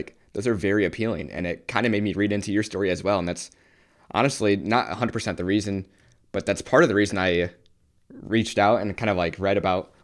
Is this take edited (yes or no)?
no